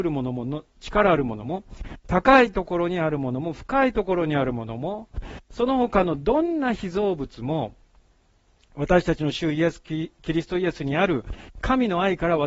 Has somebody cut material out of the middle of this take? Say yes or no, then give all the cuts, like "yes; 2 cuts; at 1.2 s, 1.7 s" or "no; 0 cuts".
no; 0 cuts